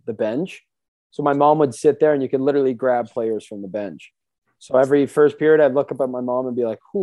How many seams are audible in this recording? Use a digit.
0